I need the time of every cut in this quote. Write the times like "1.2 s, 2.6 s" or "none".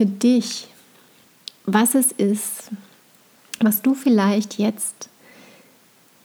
none